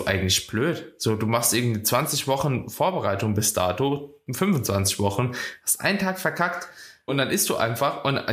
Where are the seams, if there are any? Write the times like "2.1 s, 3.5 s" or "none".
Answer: 7.1 s